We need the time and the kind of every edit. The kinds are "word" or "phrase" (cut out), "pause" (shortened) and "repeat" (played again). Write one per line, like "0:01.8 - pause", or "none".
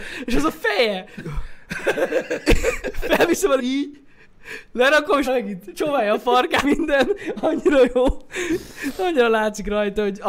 0:01.2 - word
0:03.6 - word
0:05.3 - word
0:06.6 - word

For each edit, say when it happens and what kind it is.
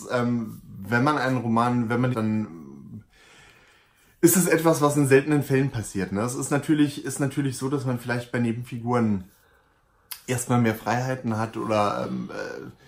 0:02.1 - phrase

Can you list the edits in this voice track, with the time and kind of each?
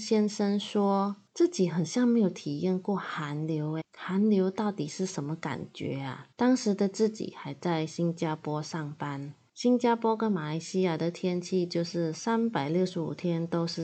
0:03.8 - word
0:06.3 - pause

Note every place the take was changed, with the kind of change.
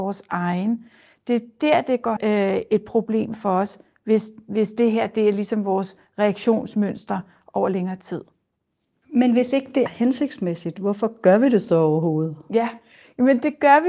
0:02.2 - phrase
0:09.9 - word

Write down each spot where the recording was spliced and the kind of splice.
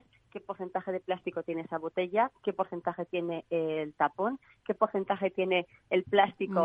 none

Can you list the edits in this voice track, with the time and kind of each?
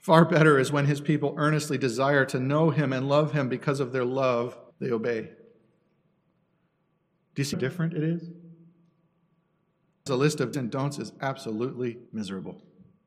0:04.7 - pause
0:07.5 - word
0:10.1 - phrase
0:10.5 - word
0:12.1 - pause

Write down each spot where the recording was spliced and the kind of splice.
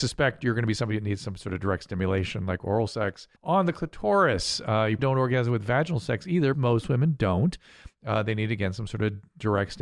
0:03.4 - pause
0:05.0 - word
0:06.5 - word

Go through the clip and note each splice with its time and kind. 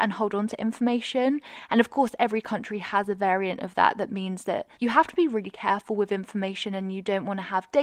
0:04.7 - pause

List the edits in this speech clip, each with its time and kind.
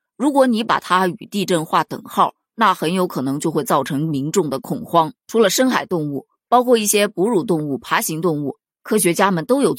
0:05.2 - pause

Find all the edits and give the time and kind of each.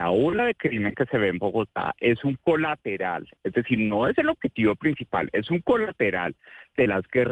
0:03.4 - pause

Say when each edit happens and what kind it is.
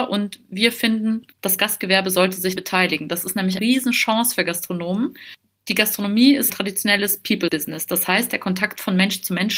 0:01.3 - pause
0:02.6 - word
0:03.6 - word
0:06.5 - word

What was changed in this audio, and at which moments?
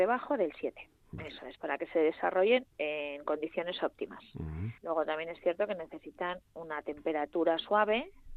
0:01.0 - pause
0:02.7 - pause
0:04.8 - pause

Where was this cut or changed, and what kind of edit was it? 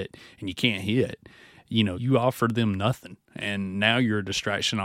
0:01.9 - word

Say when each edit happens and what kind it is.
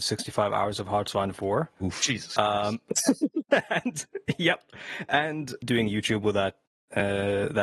none

